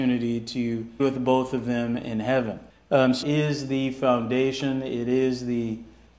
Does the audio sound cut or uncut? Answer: cut